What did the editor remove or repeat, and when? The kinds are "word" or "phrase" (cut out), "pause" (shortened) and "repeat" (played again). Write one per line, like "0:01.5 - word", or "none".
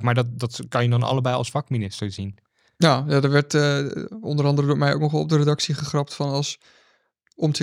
none